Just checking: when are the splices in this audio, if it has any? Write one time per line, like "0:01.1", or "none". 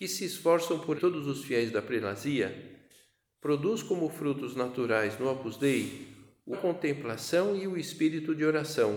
0:00.9
0:06.5